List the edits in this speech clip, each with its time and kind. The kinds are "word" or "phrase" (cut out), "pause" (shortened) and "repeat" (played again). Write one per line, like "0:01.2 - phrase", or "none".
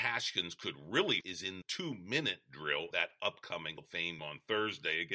0:01.2 - word
0:01.6 - word
0:02.9 - word
0:03.8 - word
0:04.2 - word

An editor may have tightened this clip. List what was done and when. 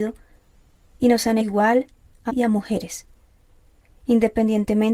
0:01.4 - phrase
0:02.3 - word

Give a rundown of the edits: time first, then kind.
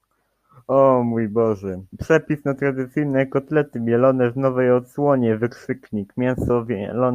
0:01.9 - pause

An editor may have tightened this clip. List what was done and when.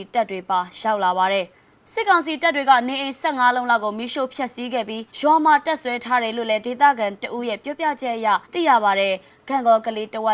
0:01.5 - pause
0:05.1 - pause
0:08.4 - pause

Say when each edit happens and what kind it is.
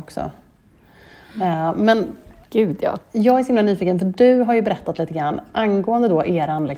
none

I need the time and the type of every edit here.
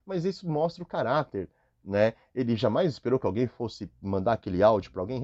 none

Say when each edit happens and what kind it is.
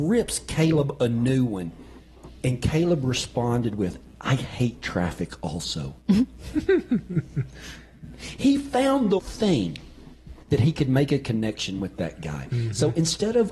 0:09.2 - word
0:10.4 - pause

